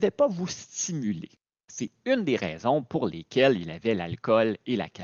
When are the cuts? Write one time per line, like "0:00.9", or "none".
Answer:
none